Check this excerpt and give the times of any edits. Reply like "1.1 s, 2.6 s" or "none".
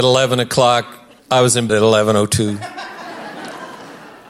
1.2 s, 1.7 s